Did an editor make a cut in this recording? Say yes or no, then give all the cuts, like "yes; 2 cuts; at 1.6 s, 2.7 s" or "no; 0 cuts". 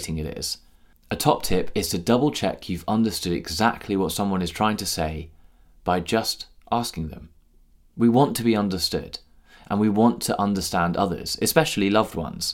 no; 0 cuts